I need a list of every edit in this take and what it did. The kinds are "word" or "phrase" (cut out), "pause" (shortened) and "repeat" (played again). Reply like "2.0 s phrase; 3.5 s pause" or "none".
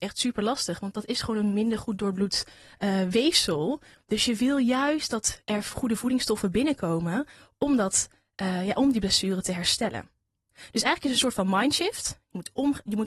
none